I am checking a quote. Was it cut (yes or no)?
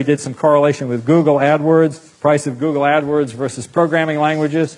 no